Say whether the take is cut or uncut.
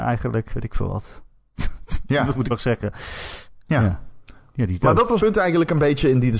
cut